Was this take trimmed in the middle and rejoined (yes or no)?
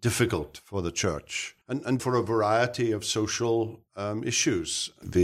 yes